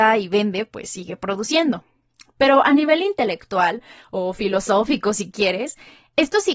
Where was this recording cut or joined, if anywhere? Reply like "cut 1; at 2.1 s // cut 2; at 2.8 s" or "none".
none